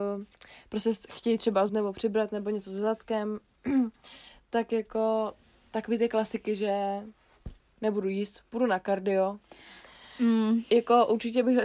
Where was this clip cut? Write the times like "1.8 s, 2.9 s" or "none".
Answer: 1.7 s